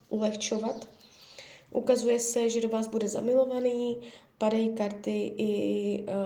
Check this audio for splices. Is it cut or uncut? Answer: uncut